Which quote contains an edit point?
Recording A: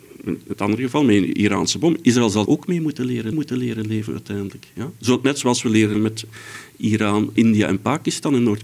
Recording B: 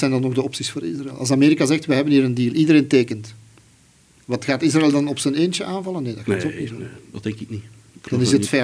A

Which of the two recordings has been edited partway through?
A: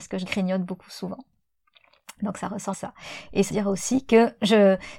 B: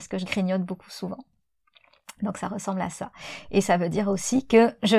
A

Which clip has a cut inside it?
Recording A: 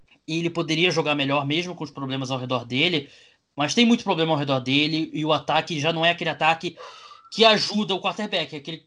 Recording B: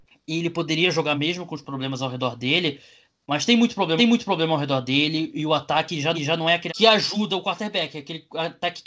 B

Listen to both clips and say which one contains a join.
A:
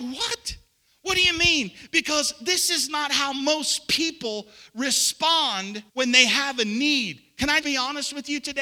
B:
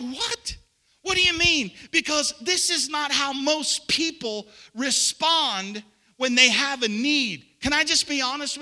A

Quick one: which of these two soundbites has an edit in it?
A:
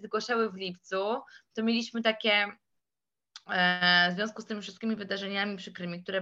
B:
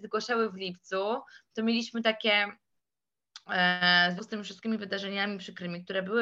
B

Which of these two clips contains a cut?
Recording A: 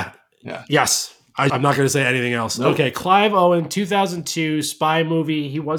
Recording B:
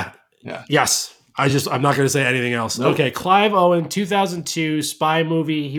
A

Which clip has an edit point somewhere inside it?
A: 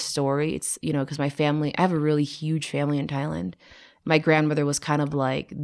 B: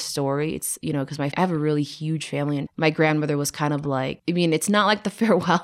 B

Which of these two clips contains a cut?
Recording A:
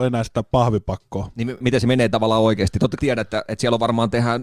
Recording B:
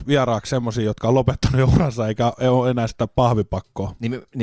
A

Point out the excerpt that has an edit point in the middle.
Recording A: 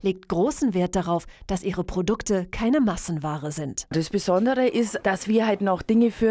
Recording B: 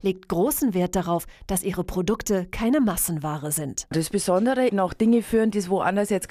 B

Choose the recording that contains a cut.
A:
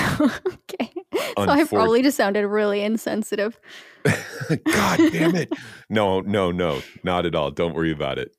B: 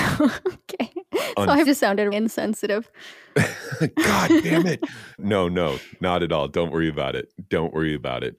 B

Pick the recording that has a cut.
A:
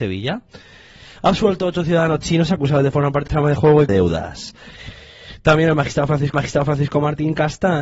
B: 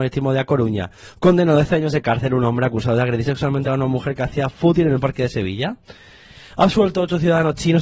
A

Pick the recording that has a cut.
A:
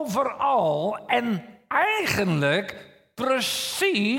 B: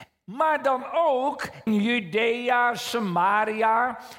B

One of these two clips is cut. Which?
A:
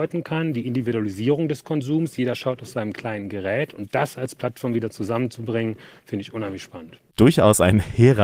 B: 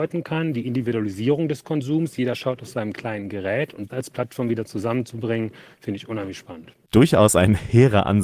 B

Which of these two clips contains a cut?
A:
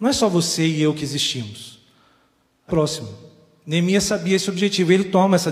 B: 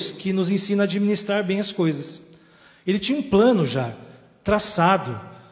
A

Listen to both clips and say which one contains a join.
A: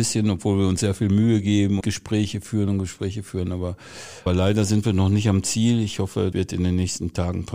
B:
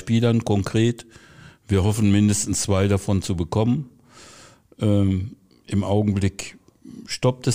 A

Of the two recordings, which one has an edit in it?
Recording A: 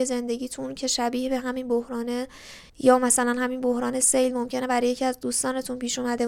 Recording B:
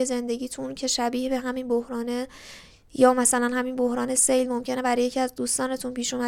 A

